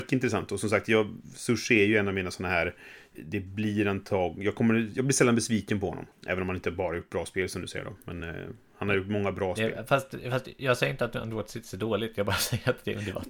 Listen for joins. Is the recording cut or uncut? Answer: uncut